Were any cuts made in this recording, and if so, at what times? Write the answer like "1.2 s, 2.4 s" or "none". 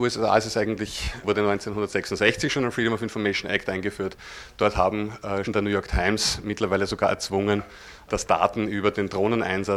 5.4 s